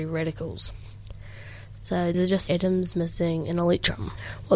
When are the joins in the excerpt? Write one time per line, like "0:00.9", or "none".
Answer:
0:02.1
0:02.5